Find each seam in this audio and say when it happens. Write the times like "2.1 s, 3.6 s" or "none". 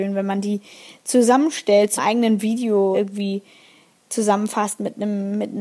2.0 s, 2.9 s